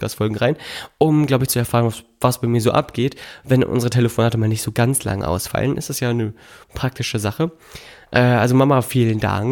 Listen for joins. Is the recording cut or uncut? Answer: uncut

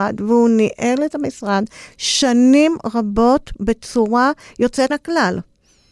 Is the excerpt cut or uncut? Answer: cut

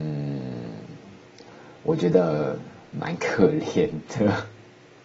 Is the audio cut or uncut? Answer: uncut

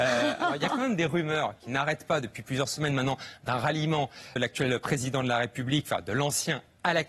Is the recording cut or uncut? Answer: cut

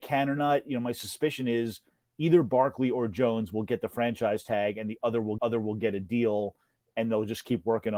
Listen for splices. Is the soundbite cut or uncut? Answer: cut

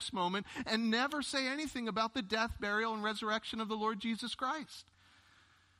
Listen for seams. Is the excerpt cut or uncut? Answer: uncut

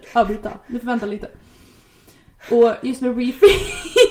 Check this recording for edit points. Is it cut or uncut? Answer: uncut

